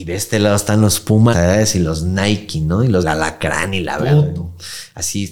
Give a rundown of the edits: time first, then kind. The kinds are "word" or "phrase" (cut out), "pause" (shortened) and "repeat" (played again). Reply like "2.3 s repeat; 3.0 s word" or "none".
1.3 s word; 3.0 s word

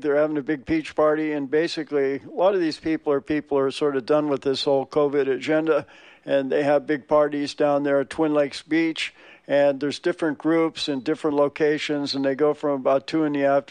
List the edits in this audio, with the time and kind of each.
none

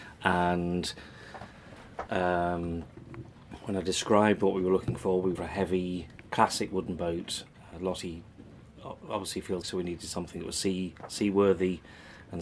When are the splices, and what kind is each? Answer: 2.1 s word; 5.3 s word; 6.3 s word; 9.6 s word

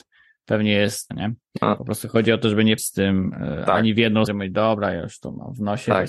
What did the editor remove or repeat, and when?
1.1 s word; 2.8 s word; 4.3 s word

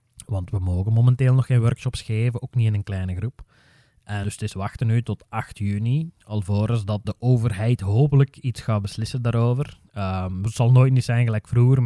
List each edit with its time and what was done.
4.2 s word; 7.0 s word

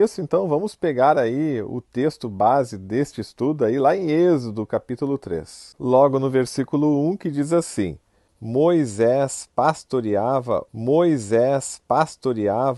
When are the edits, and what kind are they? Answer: 10.7 s repeat

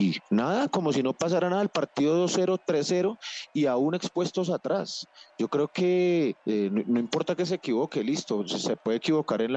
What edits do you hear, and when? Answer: 6.4 s pause

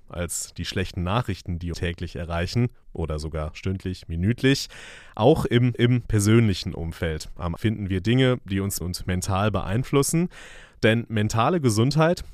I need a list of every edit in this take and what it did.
1.7 s word; 5.7 s repeat; 7.6 s word; 8.8 s word

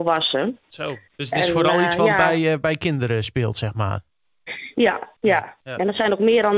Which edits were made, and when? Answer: 1.1 s pause

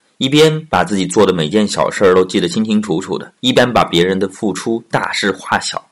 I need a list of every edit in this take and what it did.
3.4 s pause

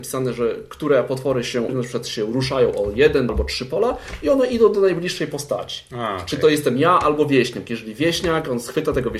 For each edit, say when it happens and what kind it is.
1.7 s word; 3.3 s word

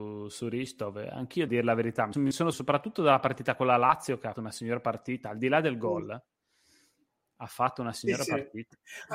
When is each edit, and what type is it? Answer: 1.5 s word; 2.1 s word; 2.5 s word; 4.3 s word

